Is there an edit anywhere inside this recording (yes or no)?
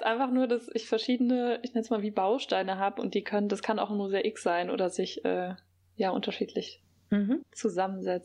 yes